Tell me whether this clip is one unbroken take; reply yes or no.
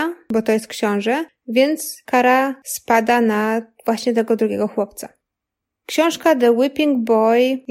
yes